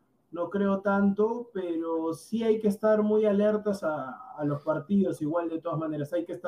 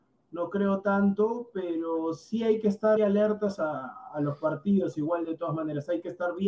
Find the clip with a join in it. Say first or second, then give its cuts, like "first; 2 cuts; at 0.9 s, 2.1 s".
second; 1 cut; at 3.0 s